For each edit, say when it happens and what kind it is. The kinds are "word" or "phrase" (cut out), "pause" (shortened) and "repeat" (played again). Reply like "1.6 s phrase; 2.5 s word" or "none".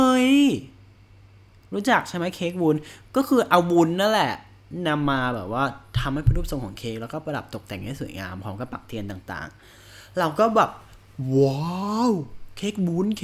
none